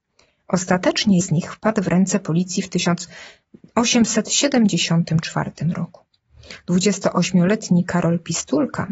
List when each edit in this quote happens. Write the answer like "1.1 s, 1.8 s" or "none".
1.2 s